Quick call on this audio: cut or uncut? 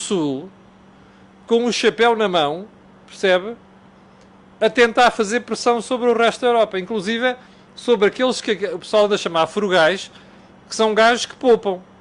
uncut